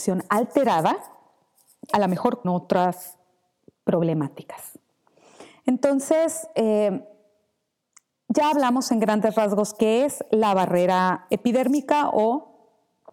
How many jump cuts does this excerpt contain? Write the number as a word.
two